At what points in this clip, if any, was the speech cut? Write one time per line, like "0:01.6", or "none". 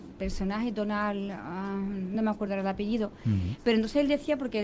none